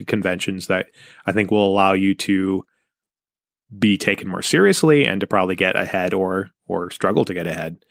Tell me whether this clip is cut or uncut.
uncut